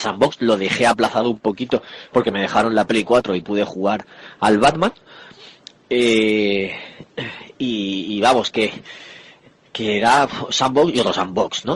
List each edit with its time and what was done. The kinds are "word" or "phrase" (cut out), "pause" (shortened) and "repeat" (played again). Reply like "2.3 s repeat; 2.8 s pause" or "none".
none

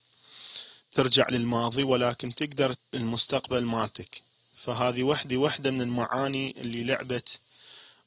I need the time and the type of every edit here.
2.7 s word; 5.3 s repeat

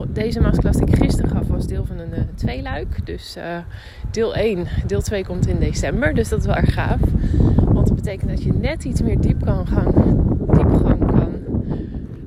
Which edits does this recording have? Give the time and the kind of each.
6.6 s phrase

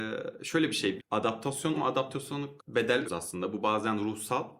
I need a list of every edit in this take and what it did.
1.0 s word; 1.7 s word; 2.6 s phrase; 3.1 s word

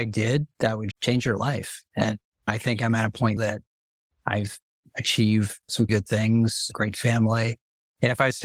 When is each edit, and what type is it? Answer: 0.9 s word; 3.4 s word; 5.9 s word

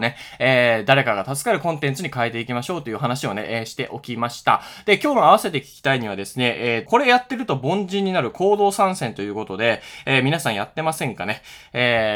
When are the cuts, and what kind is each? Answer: 6.9 s word

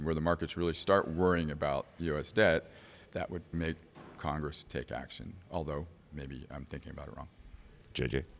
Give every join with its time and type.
3.1 s pause; 3.5 s word

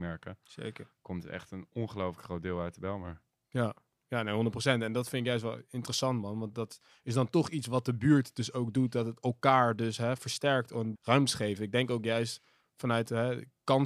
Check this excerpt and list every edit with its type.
6.5 s word; 10.9 s word

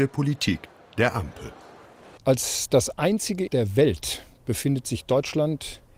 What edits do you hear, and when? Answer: 3.5 s phrase

